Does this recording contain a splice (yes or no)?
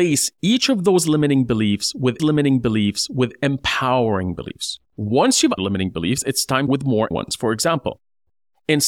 yes